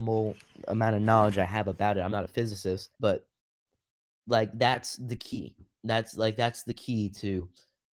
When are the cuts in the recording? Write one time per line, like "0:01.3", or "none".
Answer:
0:02.9